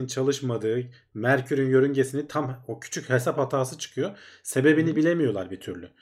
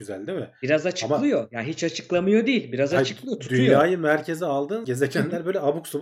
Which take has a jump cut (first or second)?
second